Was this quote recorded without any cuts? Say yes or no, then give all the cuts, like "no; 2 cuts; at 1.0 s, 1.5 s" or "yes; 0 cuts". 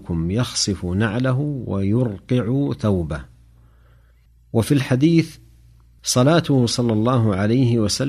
yes; 0 cuts